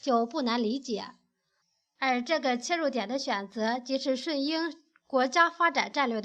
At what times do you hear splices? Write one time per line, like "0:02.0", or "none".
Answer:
none